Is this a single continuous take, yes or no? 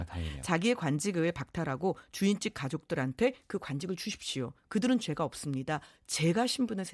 yes